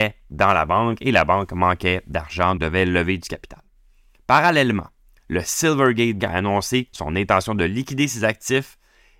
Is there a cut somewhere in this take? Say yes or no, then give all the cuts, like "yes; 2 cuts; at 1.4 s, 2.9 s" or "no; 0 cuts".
yes; 2 cuts; at 2.6 s, 6.2 s